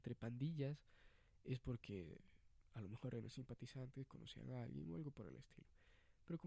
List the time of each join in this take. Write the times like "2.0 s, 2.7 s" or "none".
none